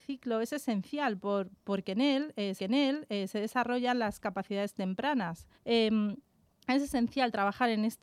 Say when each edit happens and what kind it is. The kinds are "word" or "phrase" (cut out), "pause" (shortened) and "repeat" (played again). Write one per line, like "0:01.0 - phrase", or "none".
0:02.6 - repeat
0:05.5 - pause

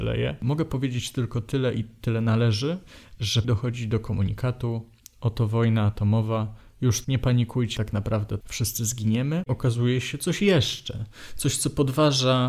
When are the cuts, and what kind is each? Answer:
0:03.4 - word
0:07.0 - word
0:07.8 - word
0:08.4 - word

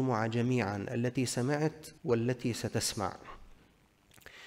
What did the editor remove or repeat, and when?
0:02.0 - pause

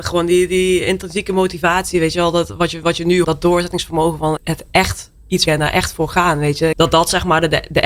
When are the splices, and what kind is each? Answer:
0:03.2 - phrase
0:04.4 - word
0:05.5 - phrase
0:06.7 - phrase

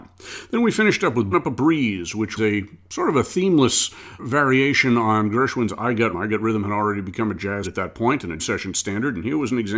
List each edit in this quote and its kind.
0:01.3 - word
0:02.4 - word
0:04.2 - word
0:06.1 - word
0:07.6 - word
0:08.4 - word

